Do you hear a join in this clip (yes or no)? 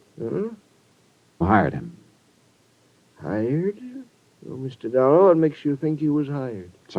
yes